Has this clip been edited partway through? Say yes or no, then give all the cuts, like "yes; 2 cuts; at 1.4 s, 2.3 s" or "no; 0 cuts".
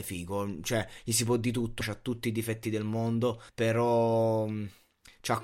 yes; 2 cuts; at 1.8 s, 3.5 s